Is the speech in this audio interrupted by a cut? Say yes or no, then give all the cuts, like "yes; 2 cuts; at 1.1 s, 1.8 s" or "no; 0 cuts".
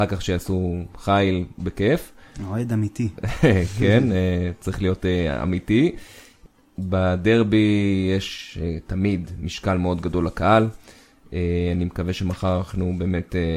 no; 0 cuts